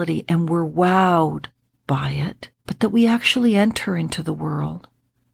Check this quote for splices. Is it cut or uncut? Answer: cut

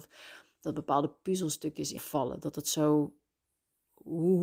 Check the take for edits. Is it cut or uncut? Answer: cut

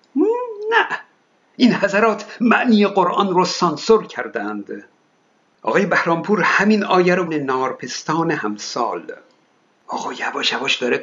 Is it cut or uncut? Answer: cut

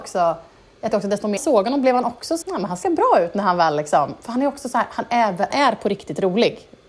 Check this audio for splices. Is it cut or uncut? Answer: cut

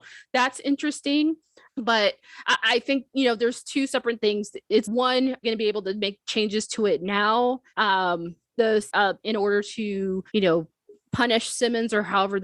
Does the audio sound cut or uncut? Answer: cut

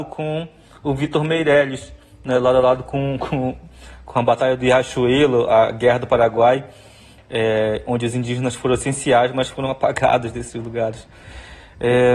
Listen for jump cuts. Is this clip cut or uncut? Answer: uncut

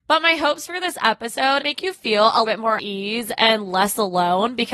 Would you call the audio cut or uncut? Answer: cut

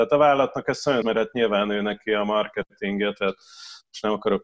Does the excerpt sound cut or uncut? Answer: cut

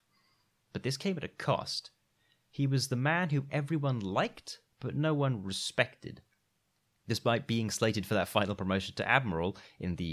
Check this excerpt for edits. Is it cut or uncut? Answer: uncut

